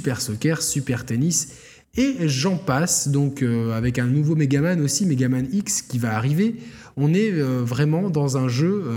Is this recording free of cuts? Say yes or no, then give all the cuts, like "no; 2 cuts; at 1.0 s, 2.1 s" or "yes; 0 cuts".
yes; 0 cuts